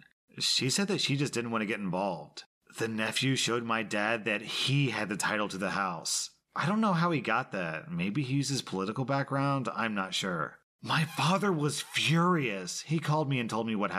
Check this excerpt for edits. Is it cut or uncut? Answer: uncut